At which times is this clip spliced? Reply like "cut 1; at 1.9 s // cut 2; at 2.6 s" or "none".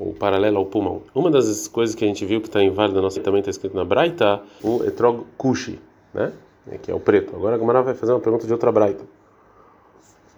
cut 1; at 1.1 s // cut 2; at 3.2 s // cut 3; at 4.6 s